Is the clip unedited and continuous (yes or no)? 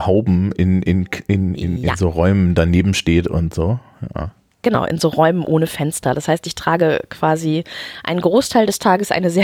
yes